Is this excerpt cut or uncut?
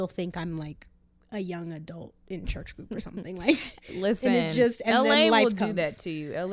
uncut